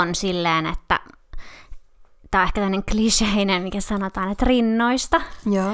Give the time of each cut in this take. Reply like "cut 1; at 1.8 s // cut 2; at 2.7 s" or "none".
none